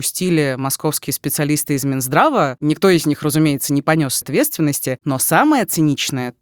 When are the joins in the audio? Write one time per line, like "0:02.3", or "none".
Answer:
0:04.2